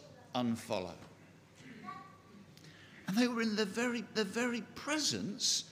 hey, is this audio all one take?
no; 1 cut; at 4.2 s

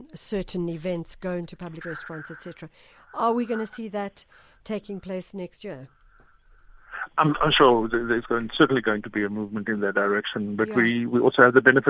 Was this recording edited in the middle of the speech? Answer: yes; 1 cut; at 1.8 s

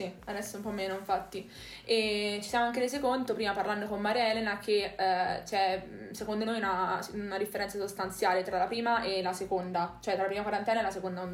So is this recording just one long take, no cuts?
yes; 0 cuts

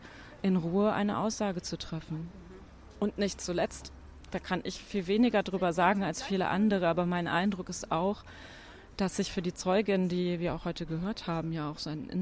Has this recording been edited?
no; 0 cuts

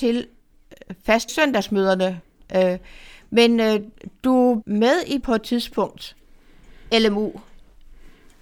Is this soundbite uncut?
no; 4 cuts; at 1.3 s, 4.6 s, 5.2 s, 6.9 s

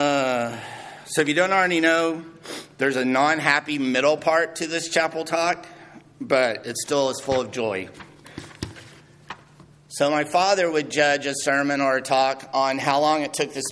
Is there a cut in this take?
no; 0 cuts

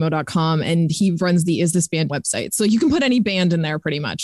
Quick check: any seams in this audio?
yes; 1 cut; at 2.1 s

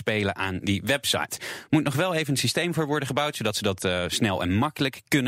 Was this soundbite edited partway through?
no; 0 cuts

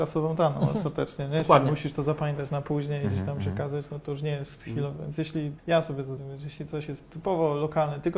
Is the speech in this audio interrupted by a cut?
yes; 3 cuts; at 4.0 s, 5.6 s, 6.2 s

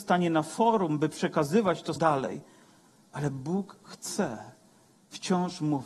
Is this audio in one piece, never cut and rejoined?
no; 1 cut; at 2.0 s

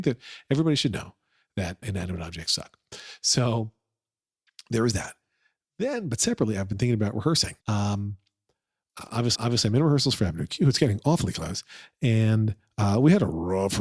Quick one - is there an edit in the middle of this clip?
yes; 3 cuts; at 1.8 s, 7.6 s, 9.3 s

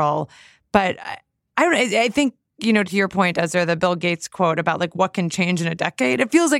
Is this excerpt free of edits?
yes; 0 cuts

